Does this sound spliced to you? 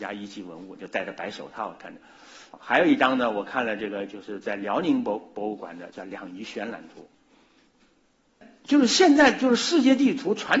no; 0 cuts

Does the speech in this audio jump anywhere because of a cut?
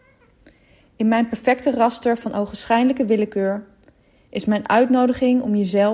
no; 0 cuts

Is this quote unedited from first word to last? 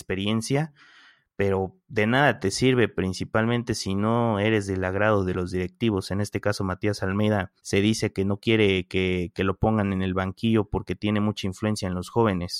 no; 1 cut; at 7.6 s

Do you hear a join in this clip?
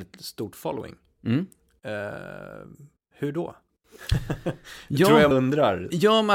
yes; 1 cut; at 5.3 s

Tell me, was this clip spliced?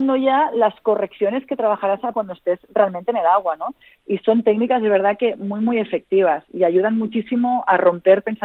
yes; 1 cut; at 2.1 s

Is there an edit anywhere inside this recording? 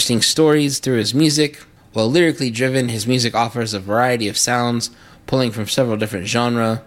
no; 0 cuts

